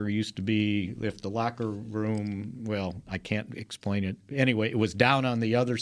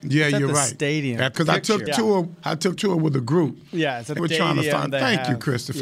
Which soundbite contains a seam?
second; 4 cuts; at 1.3 s, 1.9 s, 2.8 s, 4.2 s

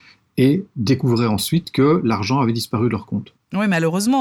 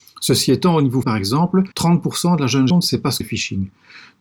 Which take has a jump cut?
second; 4 cuts; at 1.0 s, 1.7 s, 2.7 s, 3.2 s

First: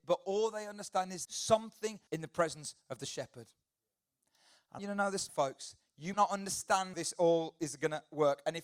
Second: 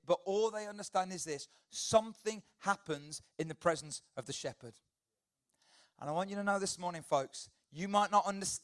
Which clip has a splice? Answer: first; 6 cuts; at 1.2 s, 2.1 s, 4.8 s, 5.3 s, 6.1 s, 6.9 s

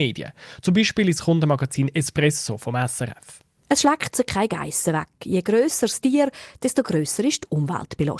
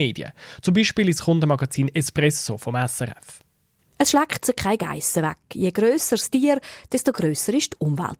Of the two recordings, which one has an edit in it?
first; 1 cut; at 3.6 s

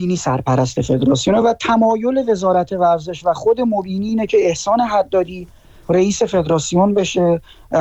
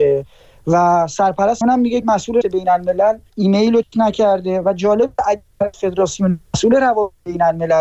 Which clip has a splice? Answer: second; 6 cuts; at 1.6 s, 2.0 s, 2.4 s, 3.3 s, 3.8 s, 5.7 s

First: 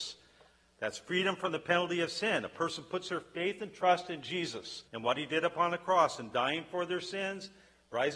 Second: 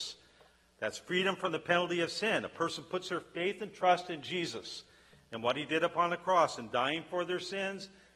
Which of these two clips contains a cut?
first; 1 cut; at 4.9 s

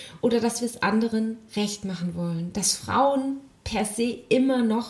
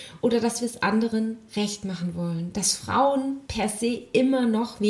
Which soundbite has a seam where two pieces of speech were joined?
second; 1 cut; at 3.4 s

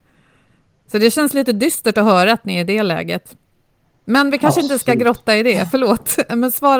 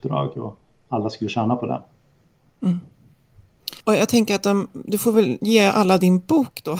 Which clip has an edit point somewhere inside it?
second; 1 cut; at 3.8 s

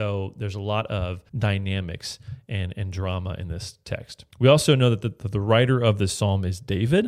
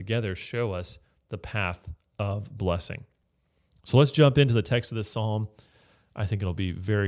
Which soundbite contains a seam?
first; 2 cuts; at 1.3 s, 4.3 s

